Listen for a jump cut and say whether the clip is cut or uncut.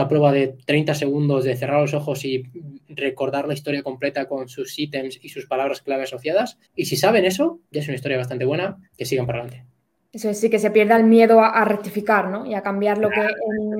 cut